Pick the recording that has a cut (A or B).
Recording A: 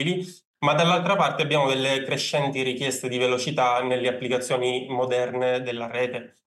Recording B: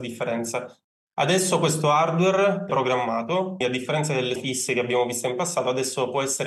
B